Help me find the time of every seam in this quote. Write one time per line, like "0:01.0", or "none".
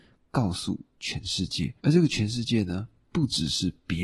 0:01.8